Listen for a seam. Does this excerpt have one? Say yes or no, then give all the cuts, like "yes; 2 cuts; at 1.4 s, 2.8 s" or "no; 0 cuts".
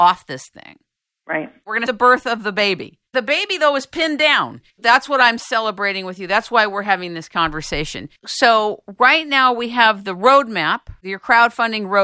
yes; 4 cuts; at 1.9 s, 3.1 s, 4.7 s, 8.2 s